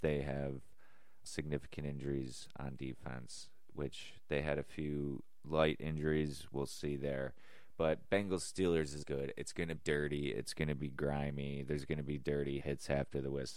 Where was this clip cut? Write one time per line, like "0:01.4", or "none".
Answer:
0:01.3
0:09.0
0:09.8
0:12.6